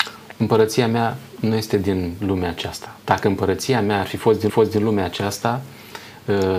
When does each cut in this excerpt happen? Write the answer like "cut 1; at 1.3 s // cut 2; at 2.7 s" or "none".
cut 1; at 4.5 s